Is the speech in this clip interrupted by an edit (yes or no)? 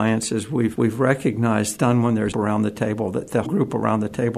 yes